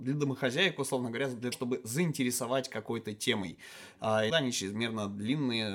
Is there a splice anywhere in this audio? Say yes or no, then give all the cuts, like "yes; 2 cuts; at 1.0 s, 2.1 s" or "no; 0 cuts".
yes; 2 cuts; at 1.5 s, 4.3 s